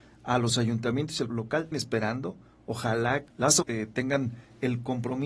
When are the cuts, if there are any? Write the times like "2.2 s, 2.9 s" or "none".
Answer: 1.3 s, 1.7 s, 3.3 s, 3.6 s